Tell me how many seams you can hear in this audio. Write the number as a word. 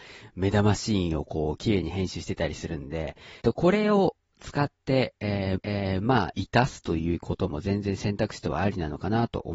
two